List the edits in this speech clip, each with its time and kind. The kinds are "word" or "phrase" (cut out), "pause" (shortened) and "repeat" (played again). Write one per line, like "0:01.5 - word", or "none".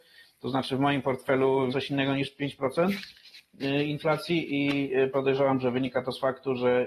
0:01.7 - phrase